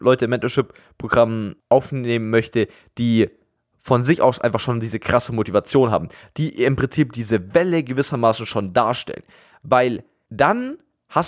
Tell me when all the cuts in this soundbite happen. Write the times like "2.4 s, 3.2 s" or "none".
none